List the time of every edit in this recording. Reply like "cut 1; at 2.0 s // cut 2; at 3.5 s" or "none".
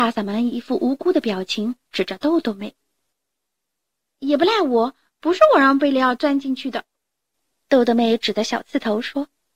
none